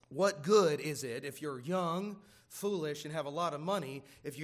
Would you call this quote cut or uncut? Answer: uncut